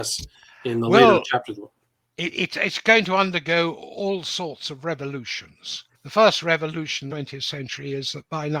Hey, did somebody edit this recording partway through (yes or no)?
yes